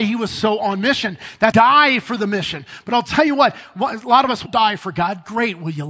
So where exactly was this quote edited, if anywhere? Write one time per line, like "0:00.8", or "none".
0:01.5
0:04.5